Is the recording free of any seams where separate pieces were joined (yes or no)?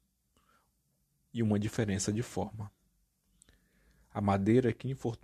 yes